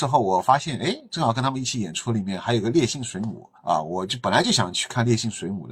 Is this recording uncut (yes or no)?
no